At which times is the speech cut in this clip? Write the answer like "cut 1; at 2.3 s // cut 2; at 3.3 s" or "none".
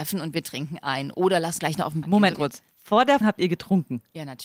cut 1; at 1.6 s // cut 2; at 2.0 s // cut 3; at 2.3 s // cut 4; at 2.7 s // cut 5; at 3.2 s